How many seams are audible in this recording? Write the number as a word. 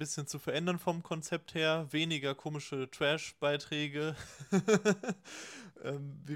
zero